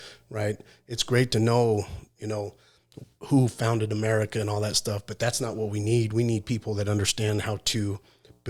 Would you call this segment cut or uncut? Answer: uncut